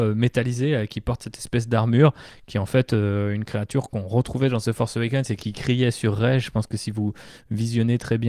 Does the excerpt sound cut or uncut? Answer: uncut